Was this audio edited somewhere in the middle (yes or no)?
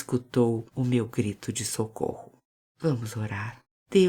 no